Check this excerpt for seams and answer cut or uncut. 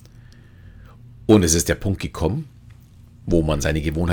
uncut